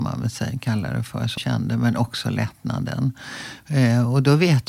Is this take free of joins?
no; 1 cut; at 1.4 s

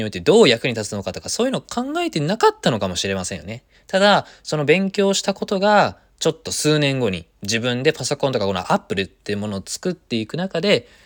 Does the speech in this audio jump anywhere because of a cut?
yes; 2 cuts; at 3.7 s, 7.3 s

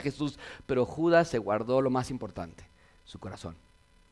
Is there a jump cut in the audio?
no; 0 cuts

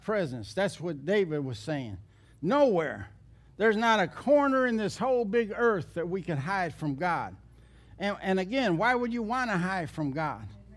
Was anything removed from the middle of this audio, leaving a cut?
no; 0 cuts

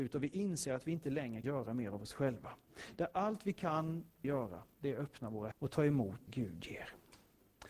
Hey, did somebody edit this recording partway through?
yes; 4 cuts; at 1.4 s, 4.2 s, 5.5 s, 6.3 s

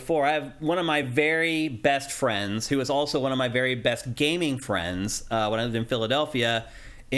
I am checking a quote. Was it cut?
no; 0 cuts

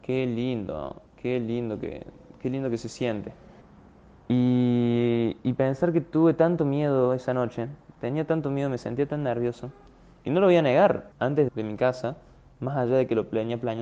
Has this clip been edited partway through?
yes; 4 cuts; at 1.1 s, 3.6 s, 11.1 s, 11.5 s

